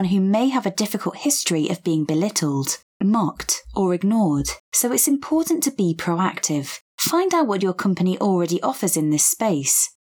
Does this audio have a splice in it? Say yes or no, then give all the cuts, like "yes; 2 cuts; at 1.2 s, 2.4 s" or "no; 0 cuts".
yes; 2 cuts; at 4.6 s, 6.9 s